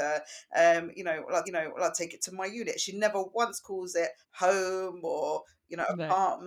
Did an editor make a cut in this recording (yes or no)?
yes